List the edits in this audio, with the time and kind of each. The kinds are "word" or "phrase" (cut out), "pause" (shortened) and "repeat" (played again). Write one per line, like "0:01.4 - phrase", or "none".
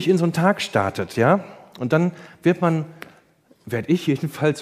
none